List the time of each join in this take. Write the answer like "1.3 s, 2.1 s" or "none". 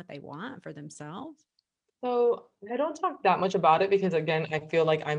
2.7 s